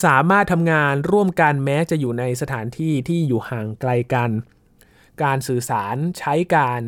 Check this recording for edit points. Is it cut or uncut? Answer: uncut